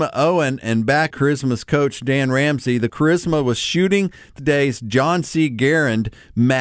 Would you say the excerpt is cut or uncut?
cut